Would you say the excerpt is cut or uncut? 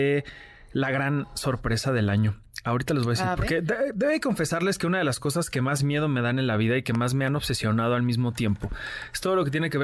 uncut